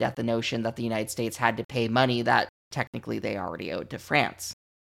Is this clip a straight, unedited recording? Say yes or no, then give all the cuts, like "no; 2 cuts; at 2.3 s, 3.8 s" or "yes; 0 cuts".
yes; 0 cuts